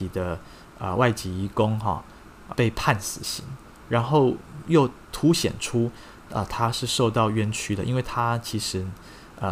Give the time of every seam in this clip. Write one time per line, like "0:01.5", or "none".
0:02.5

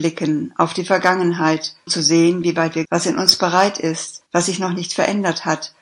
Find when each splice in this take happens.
0:01.9
0:02.8
0:04.3

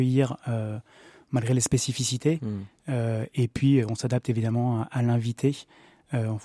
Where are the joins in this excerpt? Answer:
none

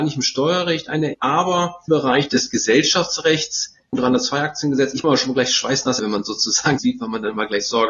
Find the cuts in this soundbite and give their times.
0:01.1
0:01.9
0:03.9
0:05.0
0:06.0
0:06.8

